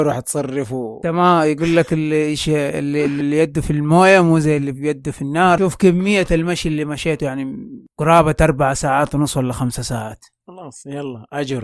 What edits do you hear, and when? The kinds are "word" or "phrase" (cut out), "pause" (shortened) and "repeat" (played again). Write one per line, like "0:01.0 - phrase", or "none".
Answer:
0:07.9 - pause